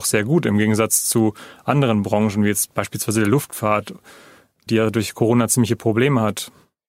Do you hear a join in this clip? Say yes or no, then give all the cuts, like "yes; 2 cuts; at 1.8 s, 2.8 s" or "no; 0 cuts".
no; 0 cuts